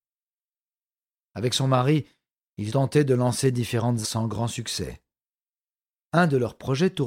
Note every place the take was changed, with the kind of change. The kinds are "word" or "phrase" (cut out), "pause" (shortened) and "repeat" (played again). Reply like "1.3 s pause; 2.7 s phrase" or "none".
2.7 s word; 4.0 s word